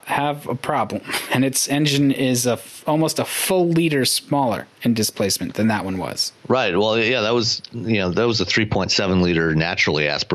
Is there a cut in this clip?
yes; 2 cuts; at 4.7 s, 6.4 s

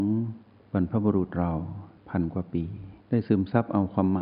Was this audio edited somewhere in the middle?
yes; 2 cuts; at 2.0 s, 3.0 s

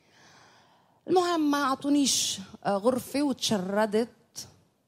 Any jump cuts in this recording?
no; 0 cuts

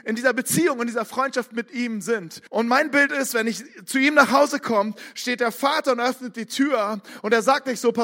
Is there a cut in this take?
yes; 1 cut; at 2.5 s

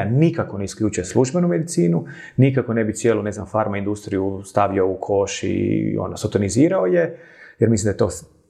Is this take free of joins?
yes; 0 cuts

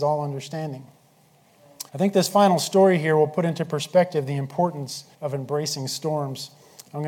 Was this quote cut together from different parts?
yes; 2 cuts; at 1.9 s, 5.1 s

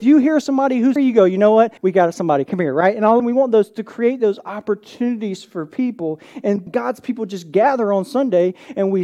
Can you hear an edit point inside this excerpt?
yes; 4 cuts; at 1.0 s, 1.8 s, 3.2 s, 6.7 s

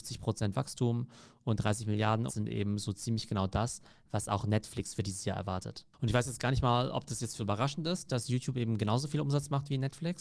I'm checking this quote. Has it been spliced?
yes; 2 cuts; at 2.3 s, 7.4 s

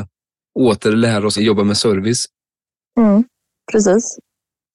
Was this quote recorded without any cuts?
no; 1 cut; at 1.4 s

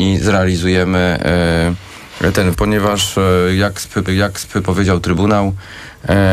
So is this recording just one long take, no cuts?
no; 2 cuts; at 2.5 s, 4.1 s

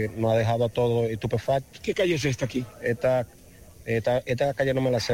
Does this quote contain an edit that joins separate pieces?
no; 0 cuts

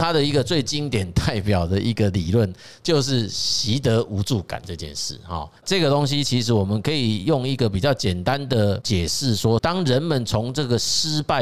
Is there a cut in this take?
yes; 1 cut; at 5.6 s

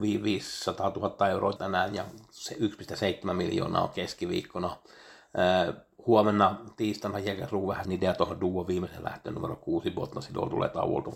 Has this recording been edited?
yes; 2 cuts; at 1.6 s, 7.8 s

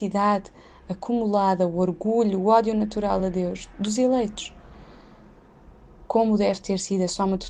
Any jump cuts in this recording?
no; 0 cuts

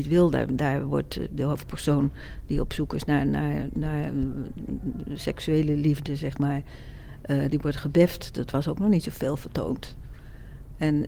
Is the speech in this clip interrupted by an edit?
no; 0 cuts

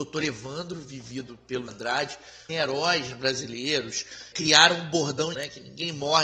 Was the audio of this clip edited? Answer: yes; 4 cuts; at 1.7 s, 2.5 s, 4.3 s, 5.3 s

